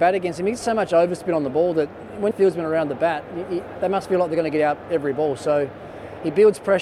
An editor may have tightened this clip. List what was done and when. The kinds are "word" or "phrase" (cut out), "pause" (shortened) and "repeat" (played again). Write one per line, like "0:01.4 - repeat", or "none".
0:02.3 - phrase